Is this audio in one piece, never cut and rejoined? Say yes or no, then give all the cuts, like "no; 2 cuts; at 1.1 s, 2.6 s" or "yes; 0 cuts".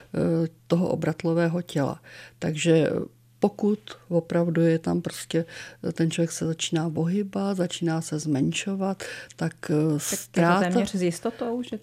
yes; 0 cuts